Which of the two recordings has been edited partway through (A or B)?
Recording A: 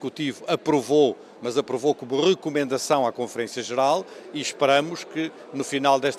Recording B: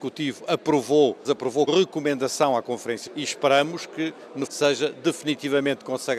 B